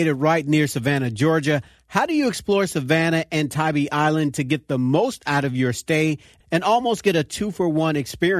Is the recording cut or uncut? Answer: uncut